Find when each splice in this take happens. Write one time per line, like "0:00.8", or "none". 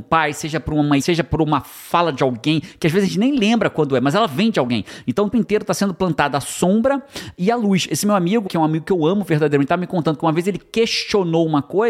0:01.0
0:05.3
0:08.5